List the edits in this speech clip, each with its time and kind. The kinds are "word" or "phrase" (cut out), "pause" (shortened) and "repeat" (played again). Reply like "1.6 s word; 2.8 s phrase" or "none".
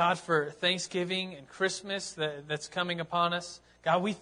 none